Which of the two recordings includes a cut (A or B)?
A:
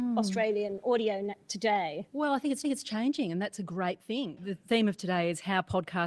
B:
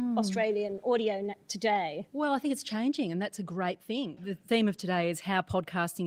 A